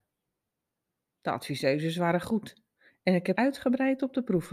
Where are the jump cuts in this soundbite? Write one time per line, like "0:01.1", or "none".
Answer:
0:02.8
0:03.3